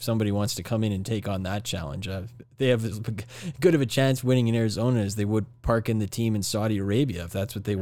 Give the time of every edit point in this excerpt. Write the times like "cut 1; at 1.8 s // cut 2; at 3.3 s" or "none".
none